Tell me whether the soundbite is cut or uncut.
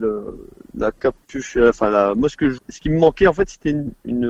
cut